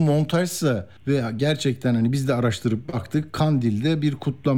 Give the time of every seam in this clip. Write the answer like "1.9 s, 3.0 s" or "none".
1.0 s